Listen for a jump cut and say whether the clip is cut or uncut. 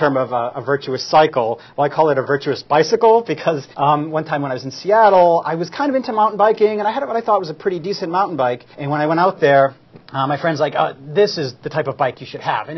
cut